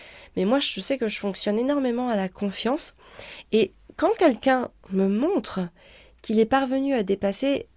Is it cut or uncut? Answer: uncut